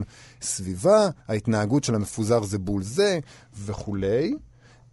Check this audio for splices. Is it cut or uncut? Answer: cut